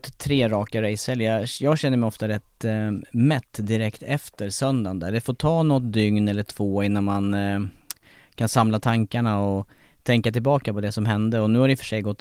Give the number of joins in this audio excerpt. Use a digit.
0